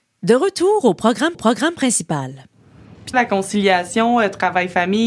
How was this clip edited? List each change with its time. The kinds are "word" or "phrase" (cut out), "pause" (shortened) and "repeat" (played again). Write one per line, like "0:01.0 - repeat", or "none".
0:01.3 - repeat
0:03.1 - word